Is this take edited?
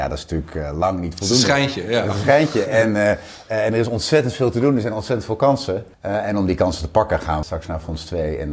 yes; 2 cuts; at 5.9 s, 7.4 s

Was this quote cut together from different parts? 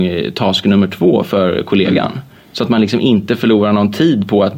no; 0 cuts

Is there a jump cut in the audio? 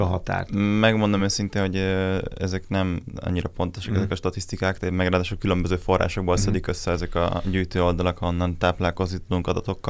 no; 0 cuts

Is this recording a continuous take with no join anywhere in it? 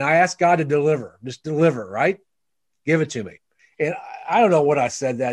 yes; 0 cuts

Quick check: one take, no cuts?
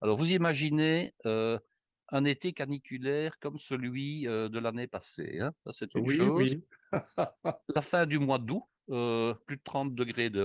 yes; 0 cuts

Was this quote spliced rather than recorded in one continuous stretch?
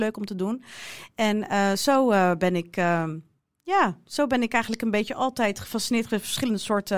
no; 0 cuts

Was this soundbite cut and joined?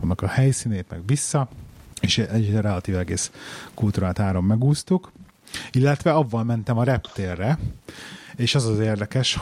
yes; 1 cut; at 1.9 s

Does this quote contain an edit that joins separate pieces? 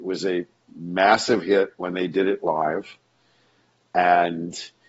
no; 0 cuts

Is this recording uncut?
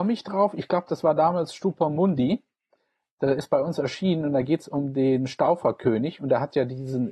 yes; 0 cuts

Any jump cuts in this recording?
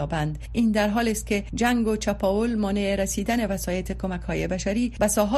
no; 0 cuts

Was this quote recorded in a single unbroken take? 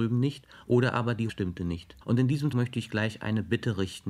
no; 3 cuts; at 1.3 s, 2.0 s, 2.5 s

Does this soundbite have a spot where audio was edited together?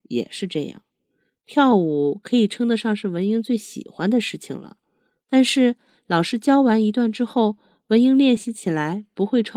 no; 0 cuts

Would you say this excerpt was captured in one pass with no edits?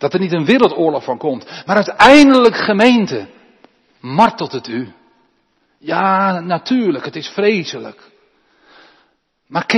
yes; 0 cuts

